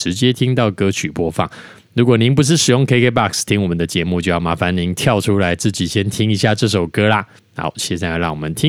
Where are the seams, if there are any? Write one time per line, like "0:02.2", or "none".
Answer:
0:07.4

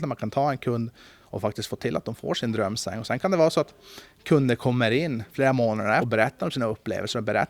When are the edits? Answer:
0:06.0

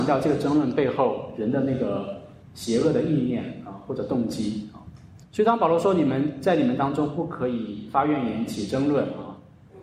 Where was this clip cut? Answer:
0:02.4
0:05.3

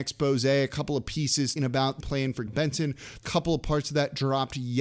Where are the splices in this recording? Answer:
0:01.6
0:02.0
0:02.5
0:03.2

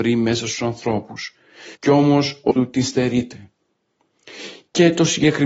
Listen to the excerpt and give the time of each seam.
0:01.8
0:02.5

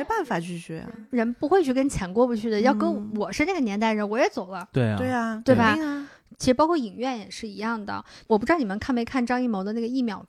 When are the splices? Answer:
none

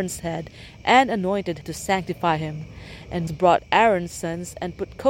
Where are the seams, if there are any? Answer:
0:01.6
0:03.3

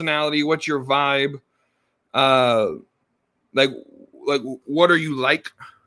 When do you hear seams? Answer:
0:04.1

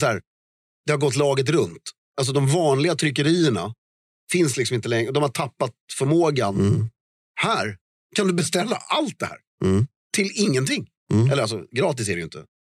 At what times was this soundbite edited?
none

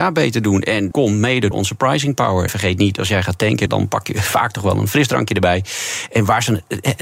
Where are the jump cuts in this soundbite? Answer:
0:00.9
0:01.5
0:02.5
0:03.7

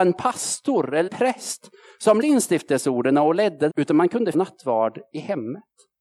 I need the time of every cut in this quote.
0:01.1
0:02.2
0:03.7
0:04.3

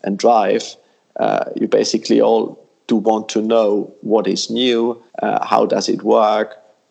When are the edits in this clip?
0:05.1

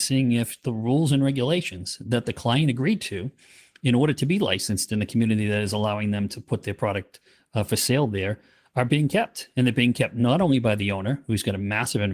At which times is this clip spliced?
none

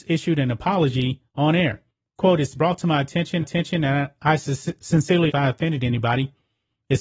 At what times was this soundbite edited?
0:01.3
0:01.9
0:02.6
0:03.4
0:05.3

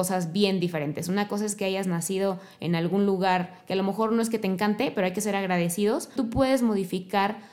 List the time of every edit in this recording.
0:06.2

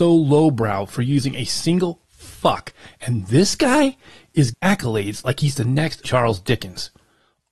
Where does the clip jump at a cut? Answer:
0:04.5
0:06.0

